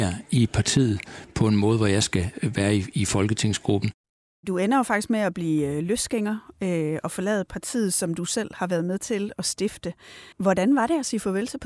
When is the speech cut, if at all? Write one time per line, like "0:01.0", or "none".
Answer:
0:10.3